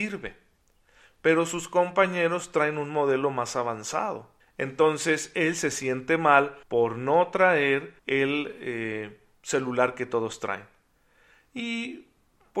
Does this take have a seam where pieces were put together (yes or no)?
yes